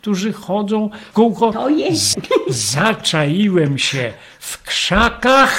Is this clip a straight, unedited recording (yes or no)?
no